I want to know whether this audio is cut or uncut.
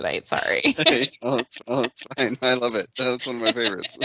cut